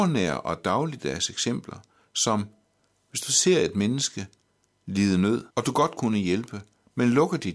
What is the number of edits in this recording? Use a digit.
1